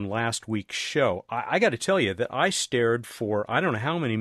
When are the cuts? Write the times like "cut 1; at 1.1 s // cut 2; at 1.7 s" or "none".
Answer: none